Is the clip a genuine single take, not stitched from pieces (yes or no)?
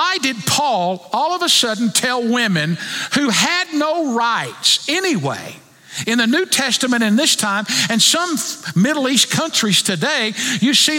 yes